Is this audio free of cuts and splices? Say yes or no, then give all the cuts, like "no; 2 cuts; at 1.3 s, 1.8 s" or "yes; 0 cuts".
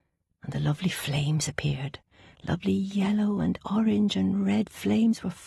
yes; 0 cuts